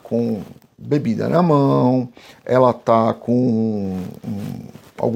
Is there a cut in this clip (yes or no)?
no